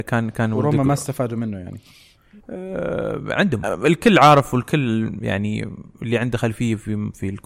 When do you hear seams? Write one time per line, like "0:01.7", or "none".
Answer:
0:02.4
0:03.6
0:05.9